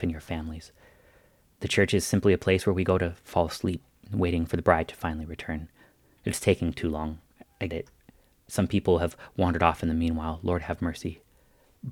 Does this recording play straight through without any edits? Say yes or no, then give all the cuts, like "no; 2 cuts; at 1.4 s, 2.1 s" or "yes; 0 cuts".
no; 1 cut; at 7.7 s